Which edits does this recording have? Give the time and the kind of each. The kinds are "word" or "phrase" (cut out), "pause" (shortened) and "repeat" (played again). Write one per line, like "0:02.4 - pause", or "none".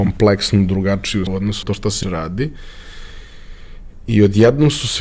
0:01.3 - word
0:01.6 - word
0:02.0 - word